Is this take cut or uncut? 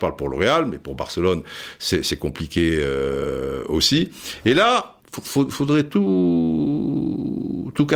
cut